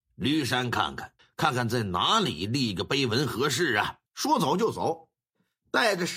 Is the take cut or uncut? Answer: cut